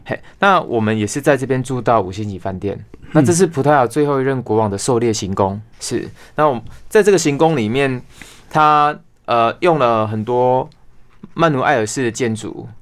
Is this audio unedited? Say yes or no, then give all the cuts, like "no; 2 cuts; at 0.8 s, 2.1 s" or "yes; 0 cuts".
no; 1 cut; at 5.7 s